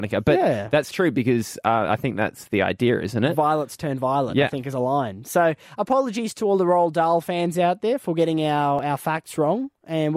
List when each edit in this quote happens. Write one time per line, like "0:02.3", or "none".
none